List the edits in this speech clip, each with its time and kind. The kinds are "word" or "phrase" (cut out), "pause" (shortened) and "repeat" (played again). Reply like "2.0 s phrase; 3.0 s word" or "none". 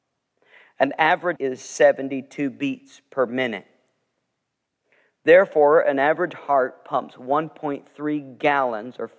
1.4 s word